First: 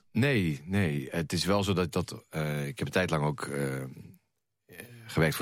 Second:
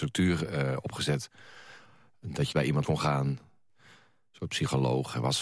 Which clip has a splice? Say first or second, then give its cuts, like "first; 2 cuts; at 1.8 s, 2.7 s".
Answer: second; 2 cuts; at 2.5 s, 2.8 s